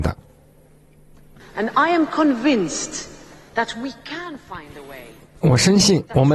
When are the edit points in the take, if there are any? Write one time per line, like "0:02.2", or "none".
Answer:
none